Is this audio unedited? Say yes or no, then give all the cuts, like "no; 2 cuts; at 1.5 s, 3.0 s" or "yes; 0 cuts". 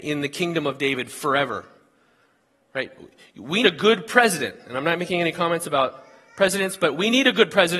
no; 1 cut; at 3.6 s